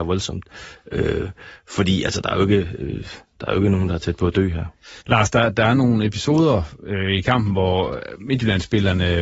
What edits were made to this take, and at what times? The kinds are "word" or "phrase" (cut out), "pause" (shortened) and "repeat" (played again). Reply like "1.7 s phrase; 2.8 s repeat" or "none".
5.0 s pause